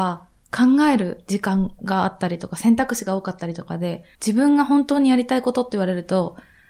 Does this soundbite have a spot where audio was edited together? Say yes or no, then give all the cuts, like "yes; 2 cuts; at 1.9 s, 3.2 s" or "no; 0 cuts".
yes; 1 cut; at 4.1 s